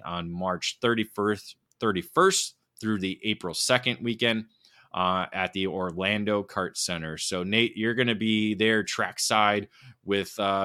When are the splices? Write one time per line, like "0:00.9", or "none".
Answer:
none